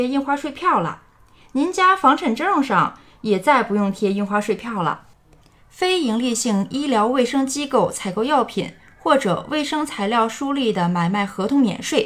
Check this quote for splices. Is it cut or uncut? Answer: uncut